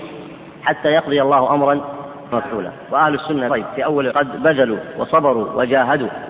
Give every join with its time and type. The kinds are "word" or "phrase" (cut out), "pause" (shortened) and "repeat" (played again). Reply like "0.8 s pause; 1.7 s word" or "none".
2.3 s word; 3.5 s word; 4.1 s word